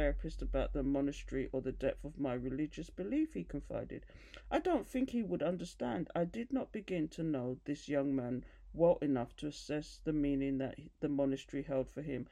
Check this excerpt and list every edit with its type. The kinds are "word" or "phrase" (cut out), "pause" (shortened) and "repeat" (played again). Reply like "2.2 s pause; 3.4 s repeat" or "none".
10.9 s pause